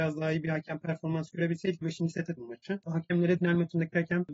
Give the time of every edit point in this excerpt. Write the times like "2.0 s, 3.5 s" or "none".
1.8 s, 2.4 s, 3.4 s